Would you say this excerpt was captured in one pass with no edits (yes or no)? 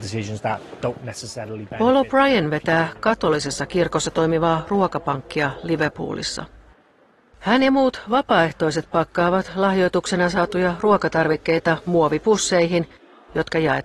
yes